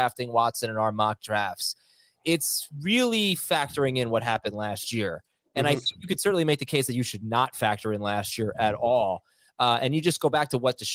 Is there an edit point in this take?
no; 0 cuts

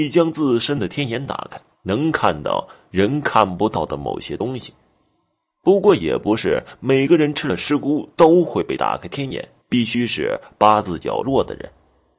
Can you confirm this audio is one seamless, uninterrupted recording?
no; 2 cuts; at 1.7 s, 9.6 s

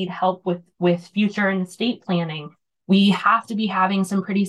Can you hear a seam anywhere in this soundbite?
no; 0 cuts

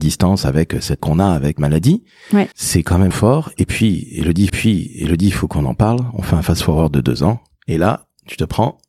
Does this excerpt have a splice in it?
yes; 5 cuts; at 1.0 s, 1.6 s, 2.5 s, 3.1 s, 4.5 s

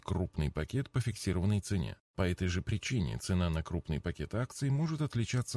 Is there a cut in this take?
yes; 1 cut; at 2.0 s

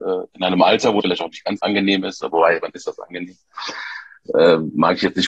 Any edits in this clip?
yes; 2 cuts; at 1.0 s, 1.6 s

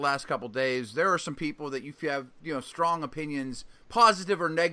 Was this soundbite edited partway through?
yes; 1 cut; at 3.8 s

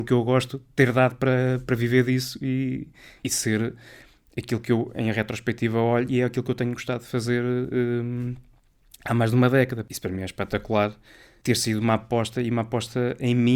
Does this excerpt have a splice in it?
no; 0 cuts

